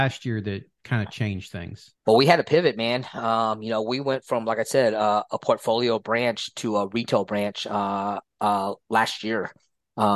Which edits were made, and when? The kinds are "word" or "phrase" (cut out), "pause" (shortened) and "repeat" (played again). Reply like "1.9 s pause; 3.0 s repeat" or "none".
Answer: 2.0 s pause